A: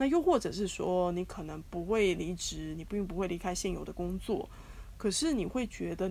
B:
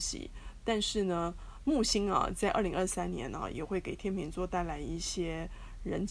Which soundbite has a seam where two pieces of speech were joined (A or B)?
B